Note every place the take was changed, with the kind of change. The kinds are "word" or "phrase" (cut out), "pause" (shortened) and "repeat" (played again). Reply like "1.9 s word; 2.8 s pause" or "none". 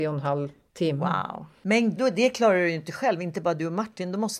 2.0 s phrase